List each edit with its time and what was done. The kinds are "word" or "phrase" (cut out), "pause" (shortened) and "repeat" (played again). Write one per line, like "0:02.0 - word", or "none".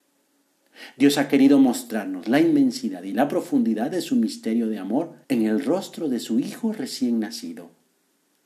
0:05.2 - pause